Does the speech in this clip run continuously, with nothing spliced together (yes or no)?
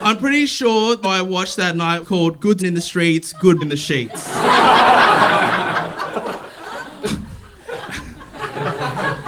no